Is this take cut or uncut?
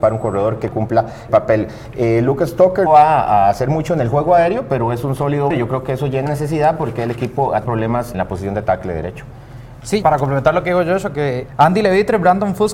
cut